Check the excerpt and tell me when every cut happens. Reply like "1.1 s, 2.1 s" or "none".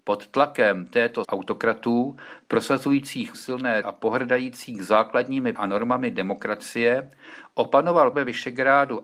1.2 s, 3.3 s, 3.8 s, 5.6 s, 8.1 s